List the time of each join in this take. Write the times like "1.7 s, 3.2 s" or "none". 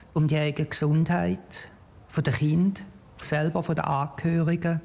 3.2 s